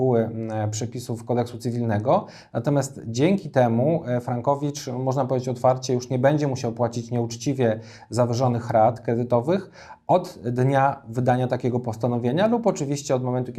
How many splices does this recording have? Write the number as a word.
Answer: zero